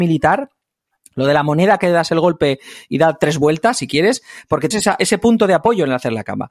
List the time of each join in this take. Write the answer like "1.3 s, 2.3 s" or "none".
4.7 s